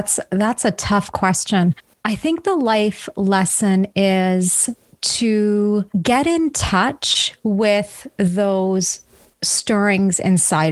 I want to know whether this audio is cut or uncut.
cut